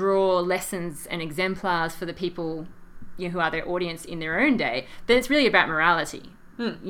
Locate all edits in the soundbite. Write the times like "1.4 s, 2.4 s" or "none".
none